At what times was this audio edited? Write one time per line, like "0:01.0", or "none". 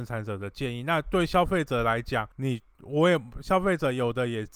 0:02.3